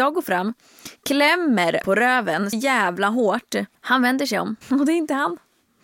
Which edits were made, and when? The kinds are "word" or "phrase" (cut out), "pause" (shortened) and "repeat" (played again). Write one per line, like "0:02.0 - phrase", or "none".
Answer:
0:01.8 - word
0:02.5 - word
0:03.7 - pause
0:04.6 - pause